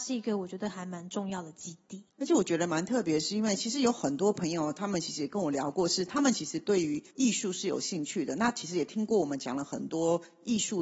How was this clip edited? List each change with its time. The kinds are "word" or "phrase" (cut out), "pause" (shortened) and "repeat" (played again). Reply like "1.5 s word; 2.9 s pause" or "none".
2.1 s pause; 7.1 s pause